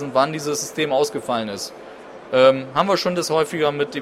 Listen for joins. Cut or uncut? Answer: uncut